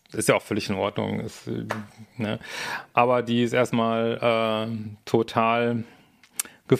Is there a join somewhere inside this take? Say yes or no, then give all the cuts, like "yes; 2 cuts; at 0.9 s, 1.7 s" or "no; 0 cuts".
yes; 1 cut; at 5.0 s